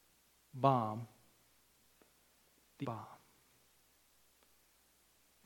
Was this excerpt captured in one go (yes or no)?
no